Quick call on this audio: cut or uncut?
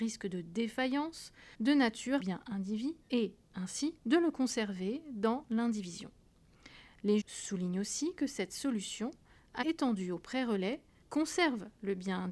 cut